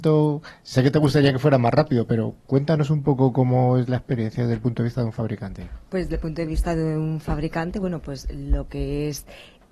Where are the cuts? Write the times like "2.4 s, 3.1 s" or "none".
2.4 s

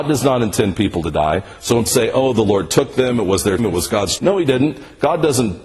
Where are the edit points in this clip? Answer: 1.9 s, 3.6 s, 4.2 s

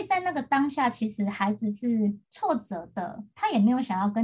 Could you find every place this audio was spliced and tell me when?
2.2 s

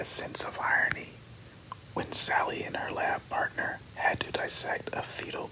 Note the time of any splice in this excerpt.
none

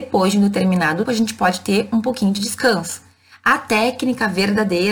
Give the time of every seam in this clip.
1.1 s

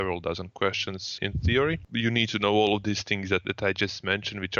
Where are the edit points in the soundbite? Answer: 1.2 s, 3.4 s

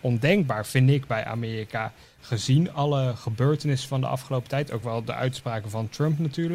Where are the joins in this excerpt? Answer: none

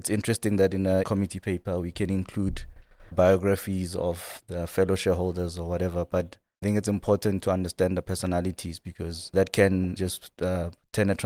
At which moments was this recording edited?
1.0 s, 3.1 s, 6.6 s, 10.0 s

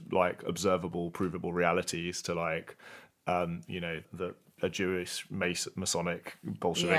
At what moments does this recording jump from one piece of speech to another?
none

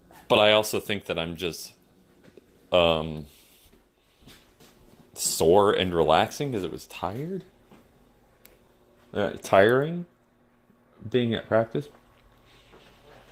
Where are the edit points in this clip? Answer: none

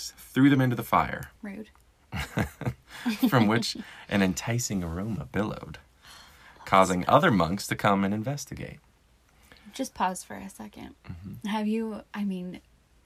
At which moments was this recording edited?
1.4 s, 12.1 s

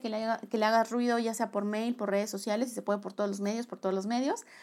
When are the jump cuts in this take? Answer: none

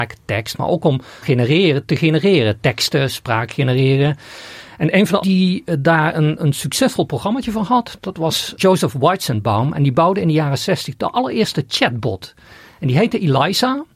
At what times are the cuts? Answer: 1.2 s, 5.2 s, 6.4 s, 8.6 s

